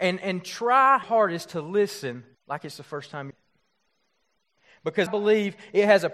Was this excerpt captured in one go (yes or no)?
no